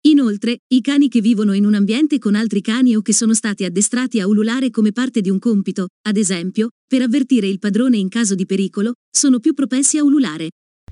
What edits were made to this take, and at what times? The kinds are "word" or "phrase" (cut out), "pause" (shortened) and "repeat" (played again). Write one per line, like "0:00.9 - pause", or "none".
none